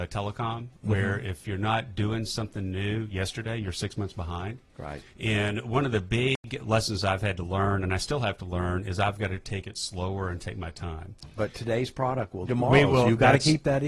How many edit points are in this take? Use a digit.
4